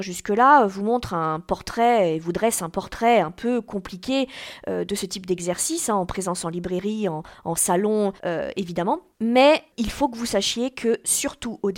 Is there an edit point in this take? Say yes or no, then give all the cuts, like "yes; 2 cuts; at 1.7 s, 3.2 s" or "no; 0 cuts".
yes; 2 cuts; at 8.2 s, 9.1 s